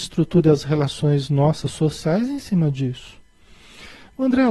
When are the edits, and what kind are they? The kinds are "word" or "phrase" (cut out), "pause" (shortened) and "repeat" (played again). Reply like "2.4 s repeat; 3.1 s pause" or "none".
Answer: none

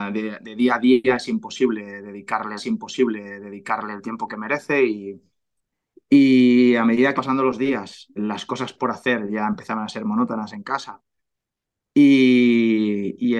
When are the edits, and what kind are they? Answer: 2.6 s repeat; 7.2 s word; 8.2 s word

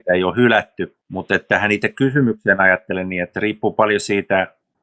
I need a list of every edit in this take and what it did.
none

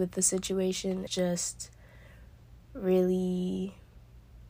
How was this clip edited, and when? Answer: 1.1 s word; 2.6 s pause

